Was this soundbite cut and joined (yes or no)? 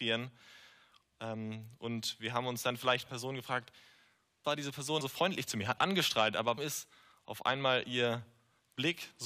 yes